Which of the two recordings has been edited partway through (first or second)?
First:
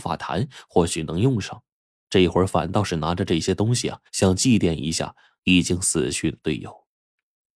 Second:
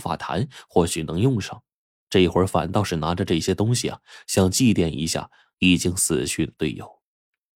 first